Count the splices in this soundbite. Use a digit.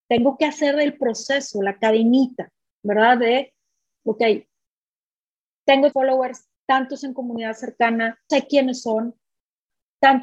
2